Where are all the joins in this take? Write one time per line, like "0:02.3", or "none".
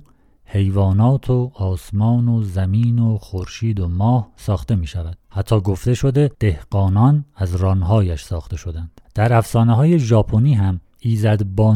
0:05.2
0:06.3
0:09.0